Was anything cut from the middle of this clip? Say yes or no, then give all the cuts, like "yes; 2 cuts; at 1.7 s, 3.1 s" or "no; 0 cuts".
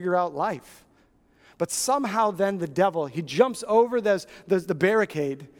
no; 0 cuts